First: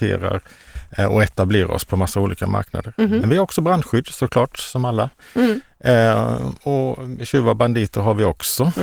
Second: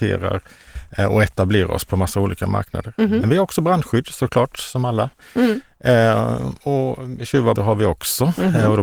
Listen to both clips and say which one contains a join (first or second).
second